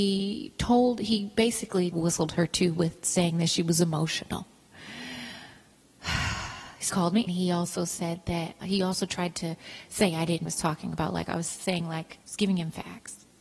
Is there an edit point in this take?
yes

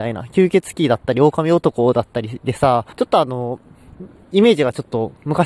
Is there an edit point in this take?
yes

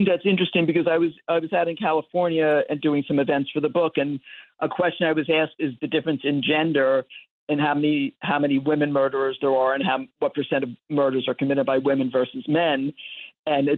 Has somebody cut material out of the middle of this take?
no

